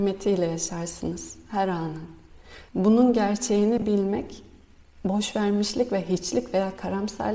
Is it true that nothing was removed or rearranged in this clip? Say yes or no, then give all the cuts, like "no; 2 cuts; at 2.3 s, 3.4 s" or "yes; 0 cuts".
no; 1 cut; at 2.7 s